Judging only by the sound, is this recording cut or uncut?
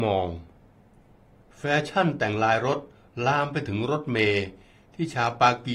uncut